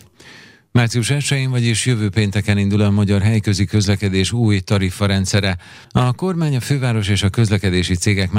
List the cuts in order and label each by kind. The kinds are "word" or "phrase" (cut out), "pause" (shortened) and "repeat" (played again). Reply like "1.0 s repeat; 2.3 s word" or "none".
5.8 s pause